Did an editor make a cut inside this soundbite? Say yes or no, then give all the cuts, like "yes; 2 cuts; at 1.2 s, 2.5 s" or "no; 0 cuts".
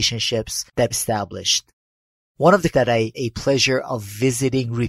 yes; 3 cuts; at 0.9 s, 2.7 s, 3.1 s